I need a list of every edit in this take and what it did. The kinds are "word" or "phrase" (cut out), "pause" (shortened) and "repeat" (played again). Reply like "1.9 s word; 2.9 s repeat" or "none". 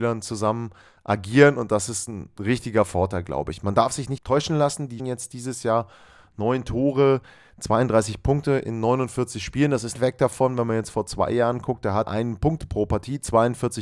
4.2 s word; 5.0 s word; 9.9 s phrase; 12.1 s word